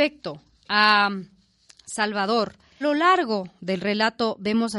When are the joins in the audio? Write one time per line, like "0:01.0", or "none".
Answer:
0:02.8